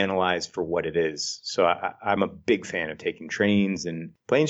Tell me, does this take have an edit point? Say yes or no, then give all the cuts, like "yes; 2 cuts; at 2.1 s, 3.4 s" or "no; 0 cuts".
no; 0 cuts